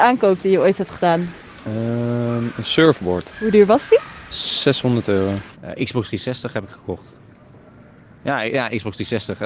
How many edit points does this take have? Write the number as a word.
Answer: zero